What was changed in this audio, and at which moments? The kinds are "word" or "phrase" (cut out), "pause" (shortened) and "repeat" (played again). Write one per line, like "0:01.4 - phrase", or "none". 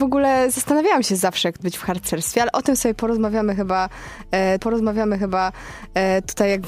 0:01.6 - word
0:04.6 - repeat